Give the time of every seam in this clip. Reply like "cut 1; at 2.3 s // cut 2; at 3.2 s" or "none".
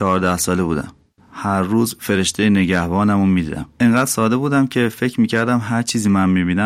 cut 1; at 1.2 s // cut 2; at 3.7 s